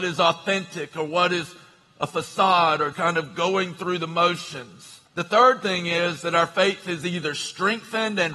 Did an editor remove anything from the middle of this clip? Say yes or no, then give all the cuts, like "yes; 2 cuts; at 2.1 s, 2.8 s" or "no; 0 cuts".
yes; 2 cuts; at 2.9 s, 5.1 s